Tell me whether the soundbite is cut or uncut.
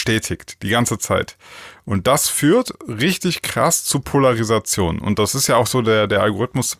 uncut